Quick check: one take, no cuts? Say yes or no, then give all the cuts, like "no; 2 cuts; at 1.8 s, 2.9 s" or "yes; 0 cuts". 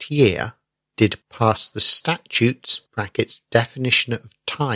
no; 2 cuts; at 1.2 s, 2.9 s